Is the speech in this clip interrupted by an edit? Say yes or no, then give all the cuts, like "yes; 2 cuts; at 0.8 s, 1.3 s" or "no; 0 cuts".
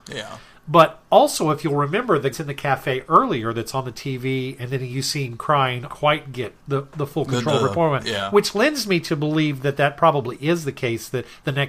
yes; 3 cuts; at 2.3 s, 5.9 s, 6.6 s